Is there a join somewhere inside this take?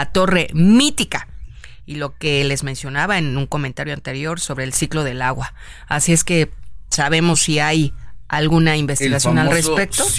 no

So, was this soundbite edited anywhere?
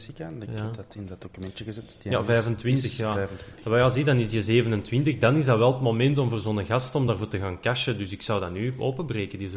no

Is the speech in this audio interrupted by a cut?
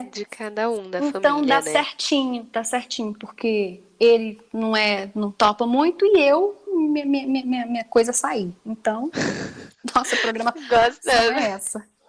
no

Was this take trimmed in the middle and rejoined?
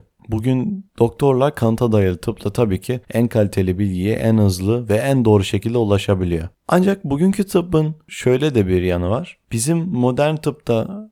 yes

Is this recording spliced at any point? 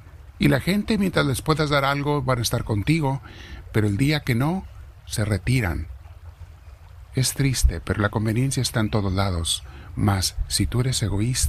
no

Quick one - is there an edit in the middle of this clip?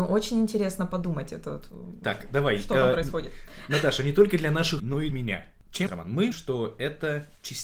yes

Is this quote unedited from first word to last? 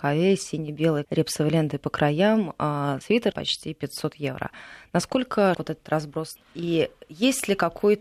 no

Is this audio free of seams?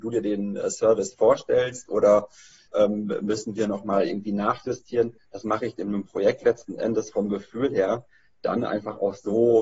yes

